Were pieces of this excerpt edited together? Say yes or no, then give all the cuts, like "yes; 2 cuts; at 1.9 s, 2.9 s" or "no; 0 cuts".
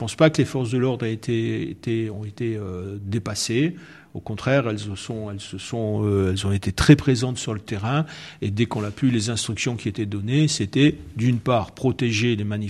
no; 0 cuts